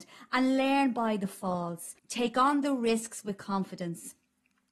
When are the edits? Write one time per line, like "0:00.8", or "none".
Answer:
0:02.0